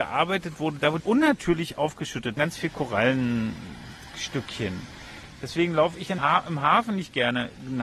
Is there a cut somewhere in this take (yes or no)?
yes